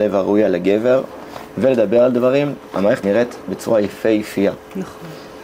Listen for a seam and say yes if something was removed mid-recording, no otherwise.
yes